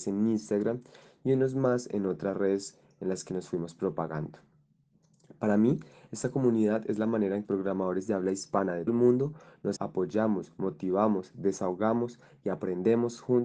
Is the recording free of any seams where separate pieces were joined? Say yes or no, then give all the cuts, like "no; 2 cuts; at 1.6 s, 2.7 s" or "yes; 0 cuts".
no; 3 cuts; at 7.4 s, 8.9 s, 9.8 s